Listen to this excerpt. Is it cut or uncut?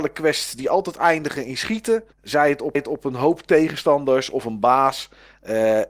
cut